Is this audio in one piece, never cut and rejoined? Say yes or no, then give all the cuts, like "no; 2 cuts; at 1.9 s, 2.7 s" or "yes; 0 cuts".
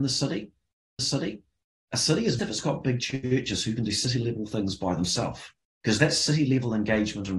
no; 3 cuts; at 1.0 s, 2.4 s, 5.6 s